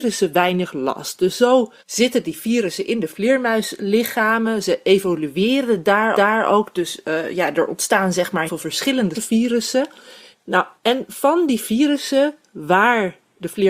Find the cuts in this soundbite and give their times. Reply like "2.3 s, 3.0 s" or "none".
1.8 s, 6.1 s, 8.5 s, 9.1 s, 10.8 s

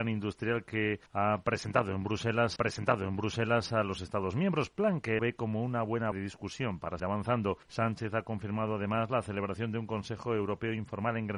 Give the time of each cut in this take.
1.1 s, 2.6 s, 5.2 s, 6.1 s, 7.0 s, 7.6 s

